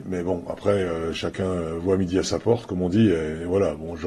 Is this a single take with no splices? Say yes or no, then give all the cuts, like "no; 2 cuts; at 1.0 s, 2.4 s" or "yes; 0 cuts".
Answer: yes; 0 cuts